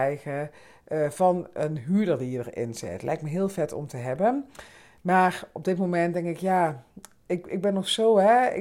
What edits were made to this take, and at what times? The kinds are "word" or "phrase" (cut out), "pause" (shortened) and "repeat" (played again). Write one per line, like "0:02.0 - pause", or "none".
none